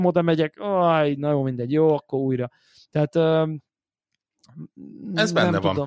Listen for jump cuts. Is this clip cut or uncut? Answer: uncut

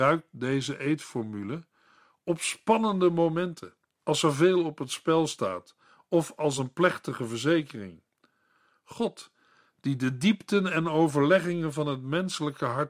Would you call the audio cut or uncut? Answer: uncut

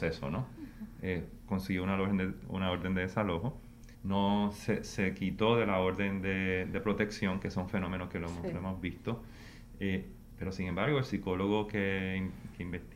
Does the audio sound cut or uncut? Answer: cut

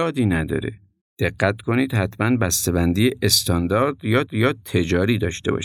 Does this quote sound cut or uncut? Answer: cut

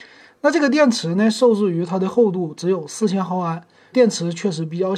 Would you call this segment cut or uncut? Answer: cut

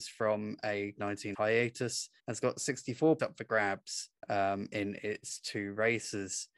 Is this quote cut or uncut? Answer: cut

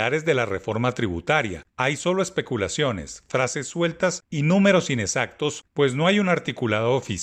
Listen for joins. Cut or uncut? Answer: uncut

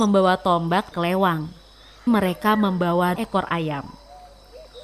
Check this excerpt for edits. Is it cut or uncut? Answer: cut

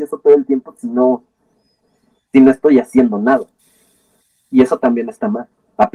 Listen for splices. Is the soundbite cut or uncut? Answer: uncut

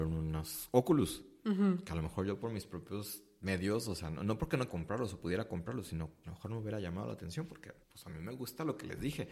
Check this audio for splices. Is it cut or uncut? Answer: cut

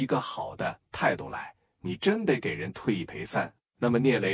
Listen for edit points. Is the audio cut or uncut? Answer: uncut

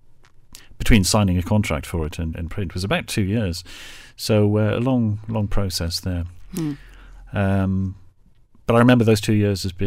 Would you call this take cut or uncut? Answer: cut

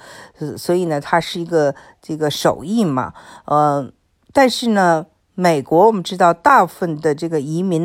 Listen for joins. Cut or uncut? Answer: uncut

